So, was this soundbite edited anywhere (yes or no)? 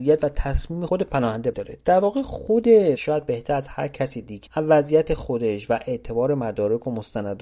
yes